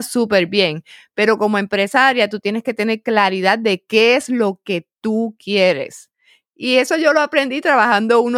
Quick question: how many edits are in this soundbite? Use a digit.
0